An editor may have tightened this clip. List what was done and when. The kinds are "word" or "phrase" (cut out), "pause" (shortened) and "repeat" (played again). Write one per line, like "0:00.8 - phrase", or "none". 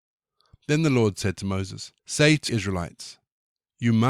0:02.0 - pause
0:02.5 - word